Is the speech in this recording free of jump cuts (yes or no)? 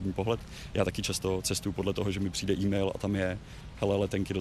yes